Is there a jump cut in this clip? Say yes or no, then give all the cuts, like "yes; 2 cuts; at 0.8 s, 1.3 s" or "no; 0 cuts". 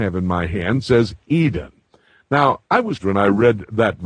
yes; 3 cuts; at 1.2 s, 2.7 s, 3.0 s